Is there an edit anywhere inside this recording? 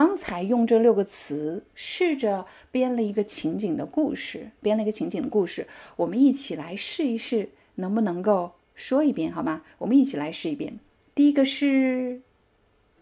no; 0 cuts

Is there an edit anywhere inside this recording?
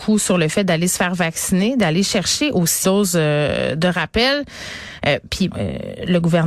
yes; 2 cuts; at 2.8 s, 5.5 s

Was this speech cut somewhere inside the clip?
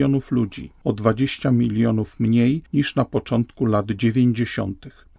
no; 0 cuts

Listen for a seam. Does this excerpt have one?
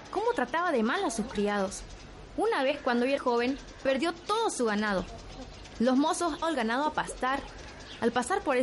yes; 2 cuts; at 3.2 s, 6.4 s

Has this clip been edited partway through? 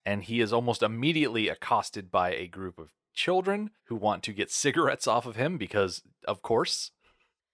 yes; 1 cut; at 3.8 s

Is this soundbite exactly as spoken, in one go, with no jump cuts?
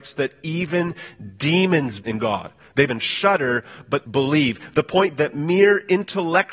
no; 4 cuts; at 2.0 s, 2.9 s, 4.0 s, 5.2 s

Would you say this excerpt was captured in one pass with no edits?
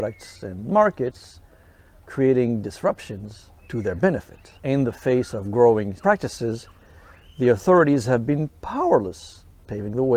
no; 3 cuts; at 3.6 s, 4.6 s, 6.0 s

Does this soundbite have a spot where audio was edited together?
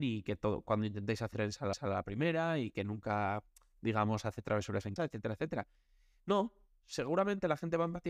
yes; 3 cuts; at 1.3 s, 1.7 s, 5.0 s

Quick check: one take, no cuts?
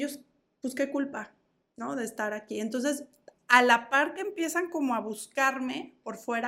yes; 0 cuts

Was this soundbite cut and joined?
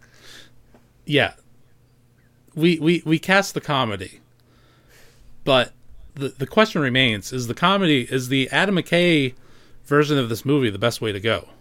yes; 1 cut; at 6.1 s

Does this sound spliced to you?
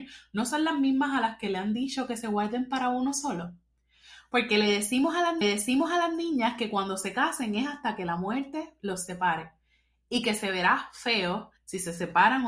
yes; 2 cuts; at 5.4 s, 11.6 s

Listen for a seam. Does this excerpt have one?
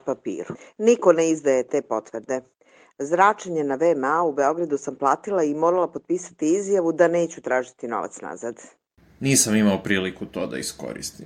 no; 0 cuts

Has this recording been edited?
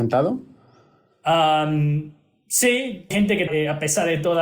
yes; 2 cuts; at 3.1 s, 3.5 s

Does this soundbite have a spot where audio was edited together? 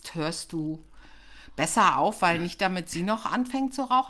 no; 0 cuts

